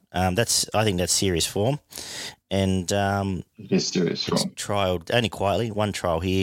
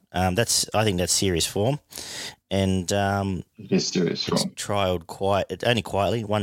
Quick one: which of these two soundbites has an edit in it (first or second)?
first